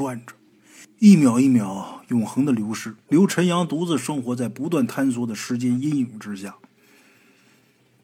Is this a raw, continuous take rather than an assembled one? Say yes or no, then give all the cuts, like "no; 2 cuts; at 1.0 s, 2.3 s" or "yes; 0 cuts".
no; 1 cut; at 3.0 s